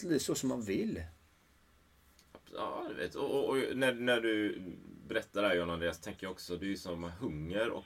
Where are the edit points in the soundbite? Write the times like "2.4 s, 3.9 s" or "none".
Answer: none